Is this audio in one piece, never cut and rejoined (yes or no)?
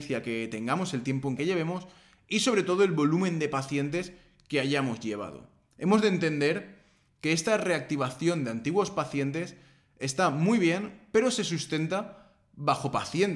no